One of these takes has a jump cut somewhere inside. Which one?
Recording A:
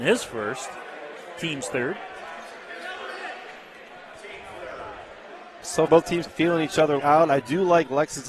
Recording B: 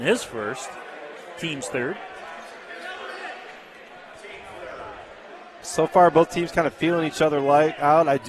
A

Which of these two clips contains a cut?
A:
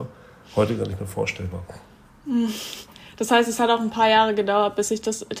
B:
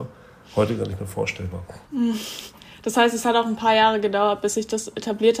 B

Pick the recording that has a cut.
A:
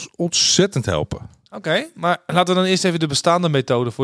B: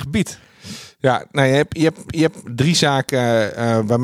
B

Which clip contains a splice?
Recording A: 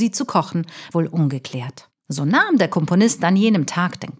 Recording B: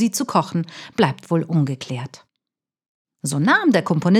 A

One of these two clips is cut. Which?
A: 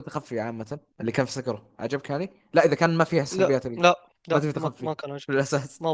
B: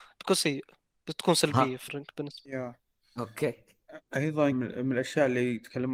B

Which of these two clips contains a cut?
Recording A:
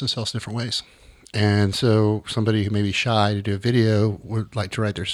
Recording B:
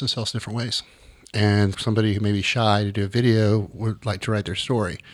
B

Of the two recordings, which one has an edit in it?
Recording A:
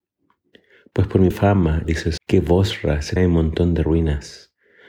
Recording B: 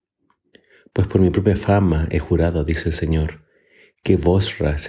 A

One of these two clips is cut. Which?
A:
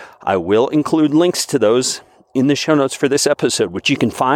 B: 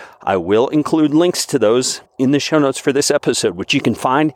B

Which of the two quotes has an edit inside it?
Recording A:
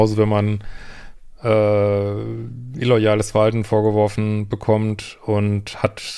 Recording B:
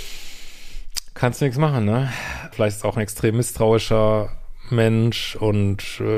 B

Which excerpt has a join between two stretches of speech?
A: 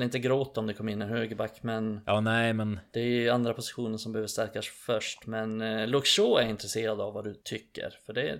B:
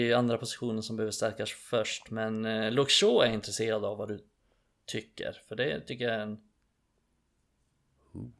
A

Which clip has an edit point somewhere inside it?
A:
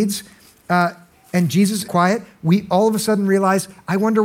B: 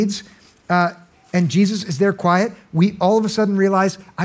A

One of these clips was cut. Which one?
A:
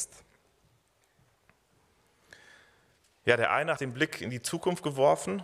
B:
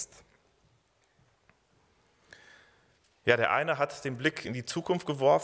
A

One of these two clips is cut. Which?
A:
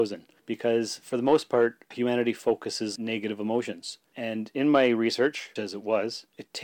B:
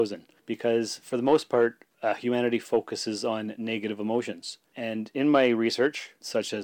A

